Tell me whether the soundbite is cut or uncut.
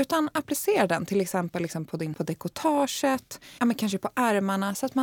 cut